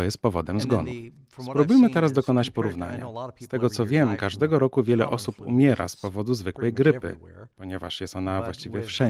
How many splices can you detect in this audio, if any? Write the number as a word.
zero